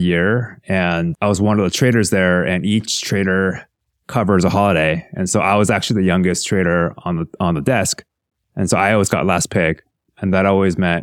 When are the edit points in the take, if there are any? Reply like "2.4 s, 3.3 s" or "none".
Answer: none